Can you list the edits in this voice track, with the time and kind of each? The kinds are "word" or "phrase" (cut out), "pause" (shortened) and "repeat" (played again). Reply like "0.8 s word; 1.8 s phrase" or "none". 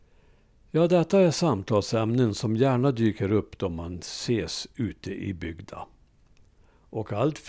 none